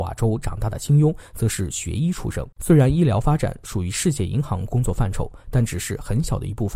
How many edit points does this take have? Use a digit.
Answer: 1